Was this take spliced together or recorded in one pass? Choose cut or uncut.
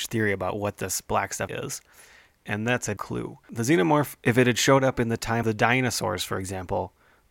cut